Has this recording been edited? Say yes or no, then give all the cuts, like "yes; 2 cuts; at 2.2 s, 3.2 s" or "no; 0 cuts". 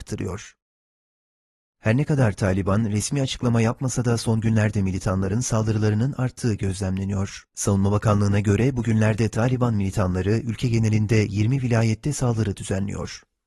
yes; 1 cut; at 7.5 s